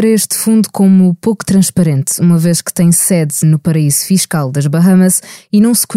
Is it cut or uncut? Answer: uncut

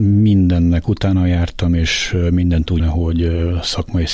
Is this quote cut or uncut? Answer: cut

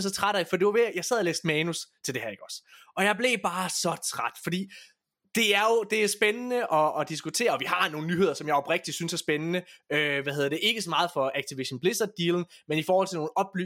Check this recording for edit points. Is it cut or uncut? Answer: cut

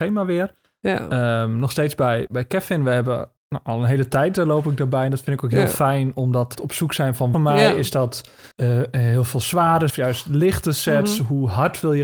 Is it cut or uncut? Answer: cut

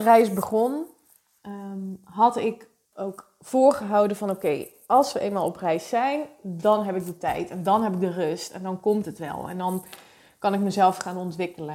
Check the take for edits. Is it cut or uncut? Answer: cut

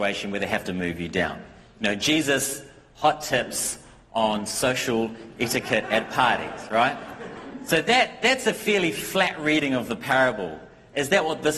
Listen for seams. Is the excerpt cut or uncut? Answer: uncut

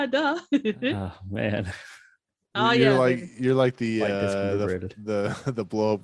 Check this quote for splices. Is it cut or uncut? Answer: uncut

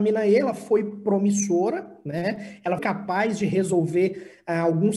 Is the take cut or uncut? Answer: cut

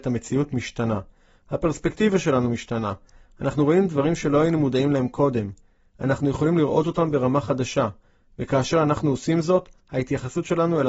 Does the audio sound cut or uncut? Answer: uncut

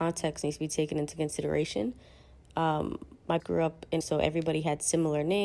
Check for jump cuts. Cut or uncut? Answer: cut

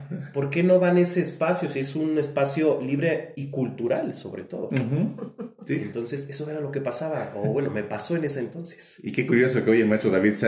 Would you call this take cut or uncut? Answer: uncut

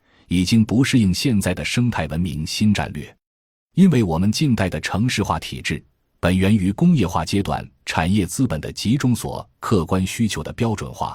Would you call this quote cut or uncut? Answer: uncut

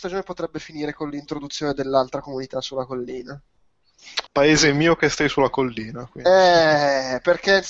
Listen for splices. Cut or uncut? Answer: cut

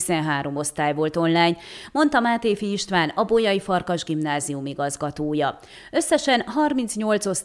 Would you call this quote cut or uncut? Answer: uncut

